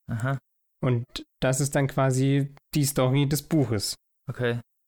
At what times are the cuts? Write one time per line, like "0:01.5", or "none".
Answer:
0:02.6